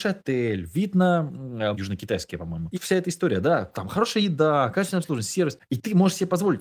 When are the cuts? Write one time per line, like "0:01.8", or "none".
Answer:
0:01.7
0:02.7